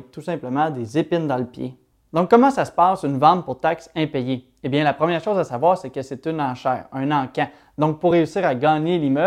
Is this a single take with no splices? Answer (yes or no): yes